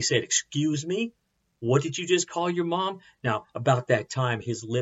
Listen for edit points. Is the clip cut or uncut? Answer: uncut